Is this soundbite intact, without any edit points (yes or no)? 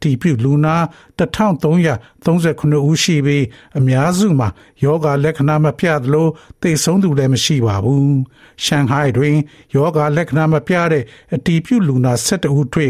yes